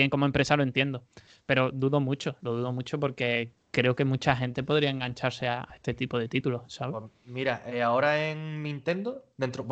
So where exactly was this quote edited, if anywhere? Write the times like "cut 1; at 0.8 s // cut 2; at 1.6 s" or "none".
none